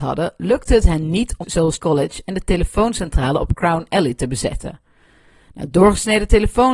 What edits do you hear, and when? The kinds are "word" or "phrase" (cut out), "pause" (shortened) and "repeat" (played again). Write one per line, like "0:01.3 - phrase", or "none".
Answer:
0:01.4 - word
0:01.8 - word